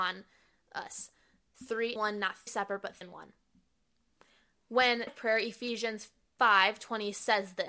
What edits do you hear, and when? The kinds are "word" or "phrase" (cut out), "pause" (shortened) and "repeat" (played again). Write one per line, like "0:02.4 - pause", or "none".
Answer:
0:02.0 - word
0:02.5 - word
0:03.0 - word
0:05.1 - word

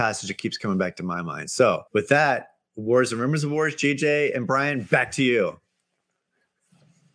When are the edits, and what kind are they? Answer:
0:01.9 - pause

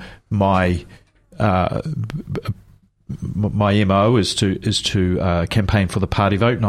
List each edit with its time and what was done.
none

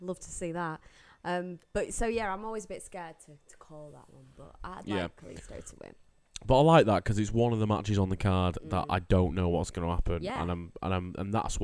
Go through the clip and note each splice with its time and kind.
none

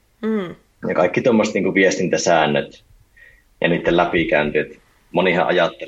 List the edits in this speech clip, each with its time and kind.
none

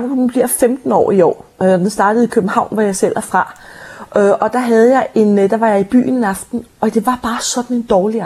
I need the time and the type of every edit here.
none

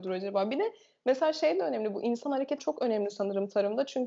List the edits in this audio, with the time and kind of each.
0:02.6 - word

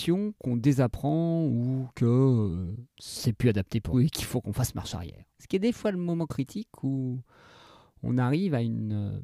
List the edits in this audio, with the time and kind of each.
0:02.9 - pause
0:03.9 - word
0:05.3 - pause

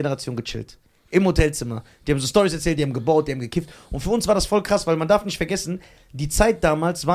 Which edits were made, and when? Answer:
none

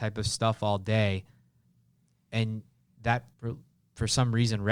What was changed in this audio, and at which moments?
0:03.3 - pause

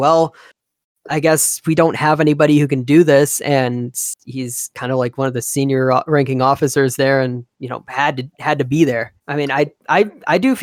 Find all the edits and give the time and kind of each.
0:07.5 - pause
0:09.2 - pause

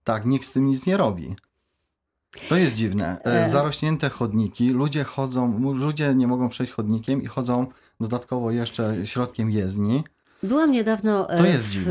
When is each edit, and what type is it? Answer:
none

